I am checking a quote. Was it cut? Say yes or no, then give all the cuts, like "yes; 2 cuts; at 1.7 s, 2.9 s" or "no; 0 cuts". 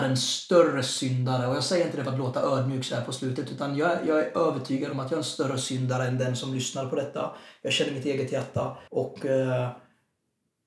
yes; 1 cut; at 8.9 s